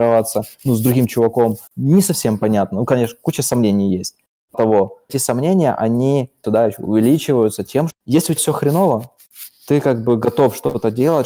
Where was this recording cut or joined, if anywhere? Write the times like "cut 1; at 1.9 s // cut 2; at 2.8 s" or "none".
cut 1; at 1.7 s // cut 2; at 4.5 s // cut 3; at 5.1 s // cut 4; at 6.4 s // cut 5; at 7.9 s // cut 6; at 8.4 s